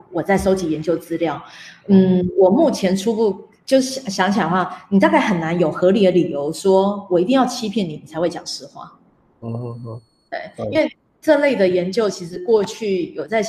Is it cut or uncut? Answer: uncut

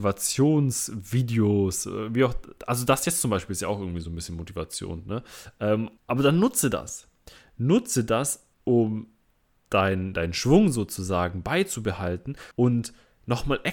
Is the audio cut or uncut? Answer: cut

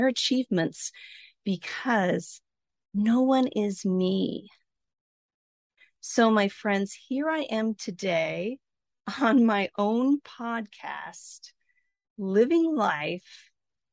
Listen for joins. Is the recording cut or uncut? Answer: uncut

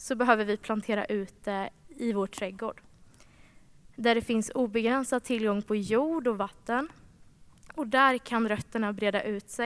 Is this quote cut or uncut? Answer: uncut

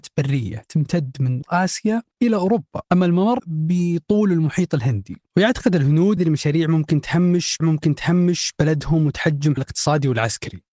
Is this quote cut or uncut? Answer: cut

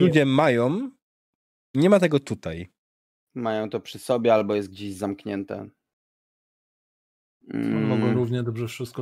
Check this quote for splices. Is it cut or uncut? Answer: uncut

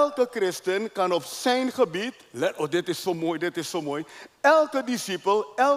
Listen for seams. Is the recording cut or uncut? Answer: uncut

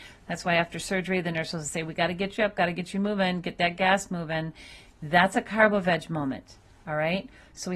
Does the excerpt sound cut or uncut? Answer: uncut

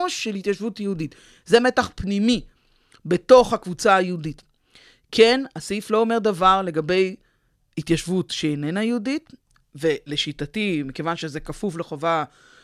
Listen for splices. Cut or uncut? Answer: uncut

